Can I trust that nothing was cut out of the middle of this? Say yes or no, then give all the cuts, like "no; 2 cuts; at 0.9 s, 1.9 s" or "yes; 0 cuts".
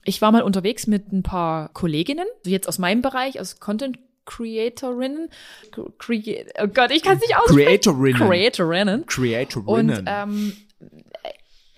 no; 3 cuts; at 1.7 s, 2.4 s, 5.6 s